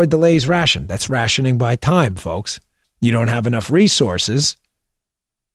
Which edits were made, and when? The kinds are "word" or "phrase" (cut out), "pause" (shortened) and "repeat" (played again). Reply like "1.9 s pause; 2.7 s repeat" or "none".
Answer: 2.8 s pause